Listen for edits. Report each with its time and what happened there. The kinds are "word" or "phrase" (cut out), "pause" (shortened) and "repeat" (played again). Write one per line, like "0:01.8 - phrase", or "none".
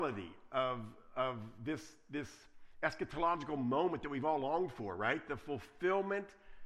none